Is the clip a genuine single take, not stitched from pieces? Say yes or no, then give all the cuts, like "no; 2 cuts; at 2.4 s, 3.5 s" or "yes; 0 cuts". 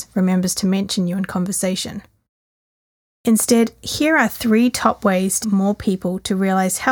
no; 1 cut; at 5.4 s